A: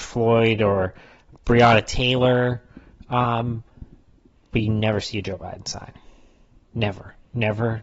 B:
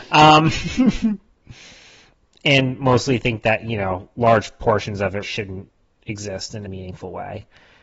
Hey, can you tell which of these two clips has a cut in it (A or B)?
B